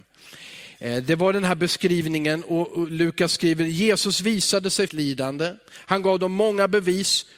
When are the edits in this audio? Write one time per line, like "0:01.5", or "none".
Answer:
0:04.9